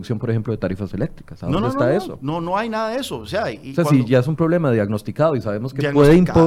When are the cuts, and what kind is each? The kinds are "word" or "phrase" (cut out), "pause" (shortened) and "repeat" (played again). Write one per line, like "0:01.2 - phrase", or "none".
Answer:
none